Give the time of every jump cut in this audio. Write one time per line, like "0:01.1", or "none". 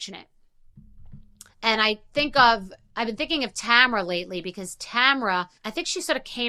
0:01.5
0:02.8
0:05.6